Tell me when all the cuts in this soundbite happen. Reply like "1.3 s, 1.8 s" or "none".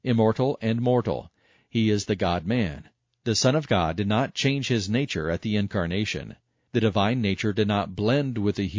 none